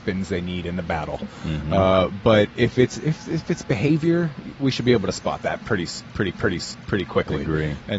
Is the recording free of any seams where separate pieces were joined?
no; 1 cut; at 6.3 s

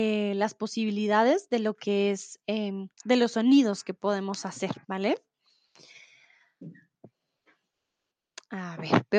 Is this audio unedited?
no; 2 cuts; at 2.9 s, 4.8 s

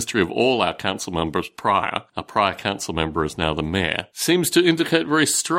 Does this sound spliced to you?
no; 0 cuts

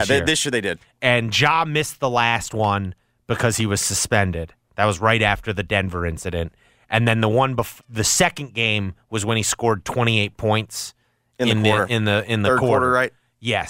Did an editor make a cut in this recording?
yes; 1 cut; at 7.8 s

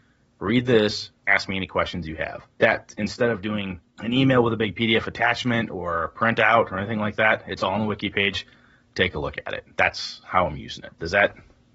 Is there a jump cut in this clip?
yes; 3 cuts; at 2.5 s, 3.9 s, 9.7 s

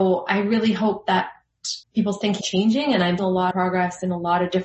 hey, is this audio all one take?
no; 4 cuts; at 1.8 s, 2.4 s, 3.2 s, 3.5 s

